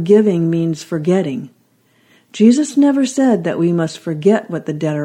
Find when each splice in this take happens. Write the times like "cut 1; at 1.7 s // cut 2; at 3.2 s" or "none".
none